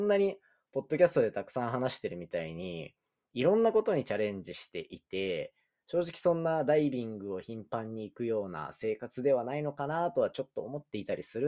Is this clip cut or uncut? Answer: uncut